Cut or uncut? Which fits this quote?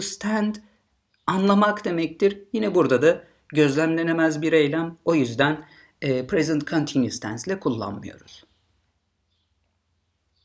uncut